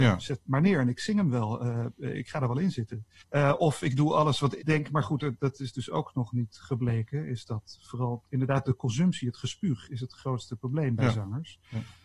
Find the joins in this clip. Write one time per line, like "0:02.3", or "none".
0:03.2
0:04.6
0:09.9